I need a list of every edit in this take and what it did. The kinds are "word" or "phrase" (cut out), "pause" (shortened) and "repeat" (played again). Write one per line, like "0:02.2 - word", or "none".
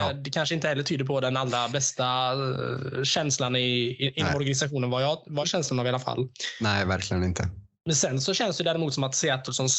0:05.4 - phrase